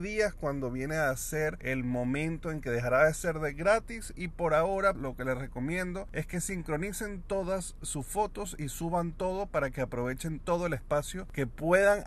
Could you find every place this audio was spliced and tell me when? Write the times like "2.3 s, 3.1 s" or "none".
4.9 s